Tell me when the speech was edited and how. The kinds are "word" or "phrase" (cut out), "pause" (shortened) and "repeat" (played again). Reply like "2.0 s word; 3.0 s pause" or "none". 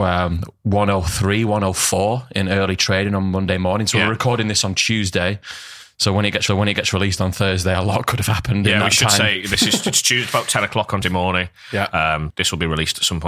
6.5 s repeat; 11.0 s word; 12.3 s word